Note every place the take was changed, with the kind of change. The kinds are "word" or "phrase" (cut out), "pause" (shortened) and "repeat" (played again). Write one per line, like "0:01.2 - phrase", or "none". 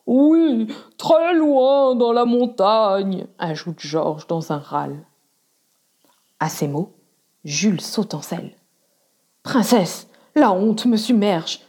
none